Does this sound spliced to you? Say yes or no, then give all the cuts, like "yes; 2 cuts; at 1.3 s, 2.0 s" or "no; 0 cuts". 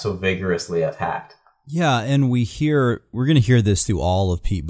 no; 0 cuts